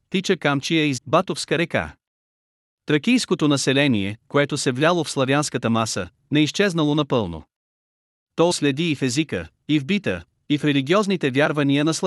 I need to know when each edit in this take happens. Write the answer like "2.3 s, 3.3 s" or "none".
1.0 s, 8.5 s

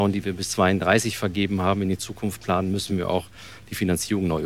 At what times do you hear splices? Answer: none

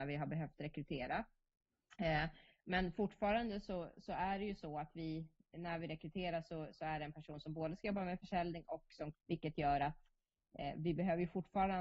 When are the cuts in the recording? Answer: 9.1 s

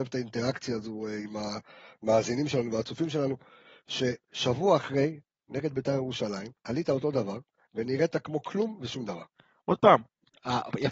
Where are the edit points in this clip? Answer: 6.6 s

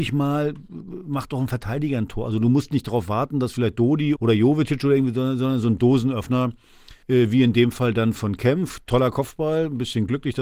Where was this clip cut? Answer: 4.2 s, 7.0 s, 8.1 s

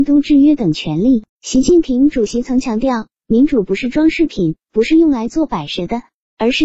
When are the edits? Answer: 1.3 s

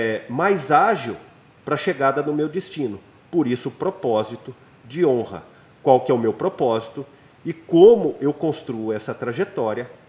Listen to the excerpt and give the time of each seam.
none

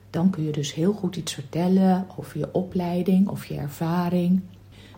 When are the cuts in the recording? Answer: none

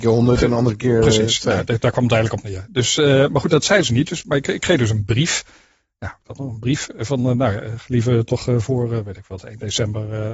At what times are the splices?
none

